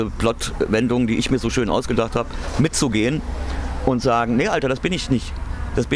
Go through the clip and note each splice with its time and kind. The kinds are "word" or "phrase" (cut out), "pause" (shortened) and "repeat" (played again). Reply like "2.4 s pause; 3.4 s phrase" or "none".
none